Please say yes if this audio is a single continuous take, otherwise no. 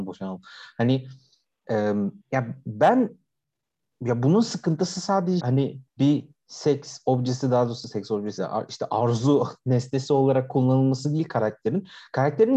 no